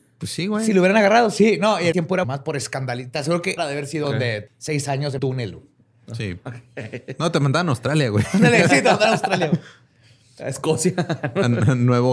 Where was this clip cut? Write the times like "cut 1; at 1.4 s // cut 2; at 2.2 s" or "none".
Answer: cut 1; at 1.9 s // cut 2; at 2.2 s // cut 3; at 3.6 s // cut 4; at 4.0 s // cut 5; at 4.5 s // cut 6; at 5.2 s